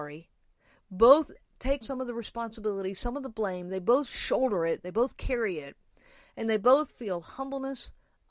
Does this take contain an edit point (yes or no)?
yes